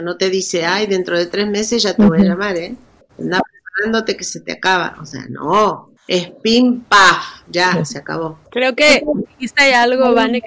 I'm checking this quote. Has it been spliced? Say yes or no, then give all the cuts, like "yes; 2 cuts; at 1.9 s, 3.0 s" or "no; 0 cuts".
yes; 3 cuts; at 3.0 s, 6.0 s, 8.5 s